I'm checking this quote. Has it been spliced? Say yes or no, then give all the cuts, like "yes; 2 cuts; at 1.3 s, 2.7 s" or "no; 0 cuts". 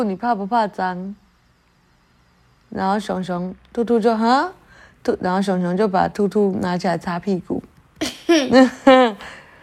no; 0 cuts